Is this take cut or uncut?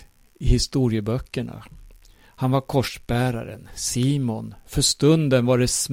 uncut